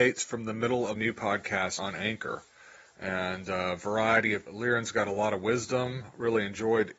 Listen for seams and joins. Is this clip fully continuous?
no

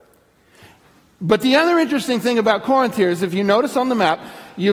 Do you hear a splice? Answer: no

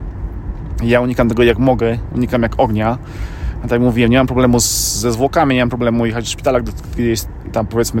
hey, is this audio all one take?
yes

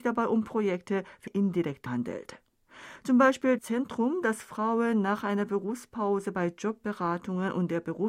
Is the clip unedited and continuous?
no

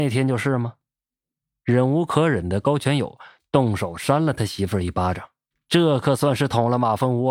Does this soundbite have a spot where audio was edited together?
yes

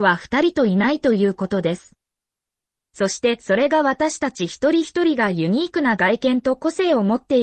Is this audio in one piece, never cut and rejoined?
yes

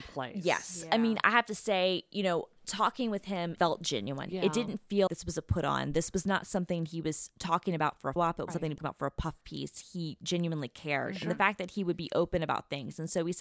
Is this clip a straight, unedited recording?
no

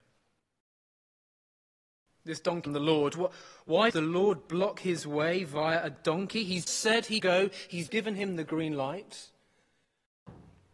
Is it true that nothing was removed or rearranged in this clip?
no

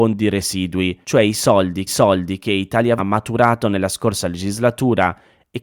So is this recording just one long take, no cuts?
no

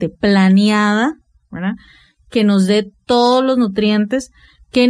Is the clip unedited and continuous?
yes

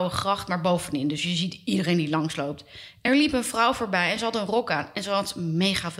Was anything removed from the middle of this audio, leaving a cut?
no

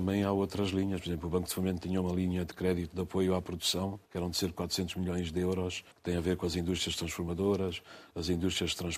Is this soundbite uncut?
no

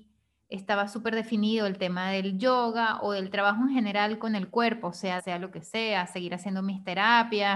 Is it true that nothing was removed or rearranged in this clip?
no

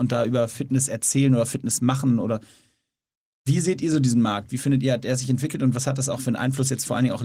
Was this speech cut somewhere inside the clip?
no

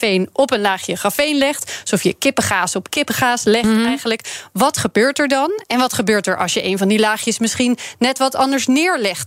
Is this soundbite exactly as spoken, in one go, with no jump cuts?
yes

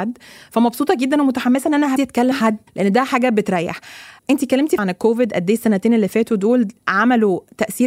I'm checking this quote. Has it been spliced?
yes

